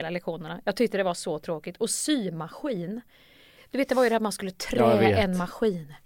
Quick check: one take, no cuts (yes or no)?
yes